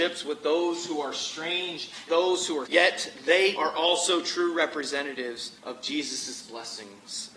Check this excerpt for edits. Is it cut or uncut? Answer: cut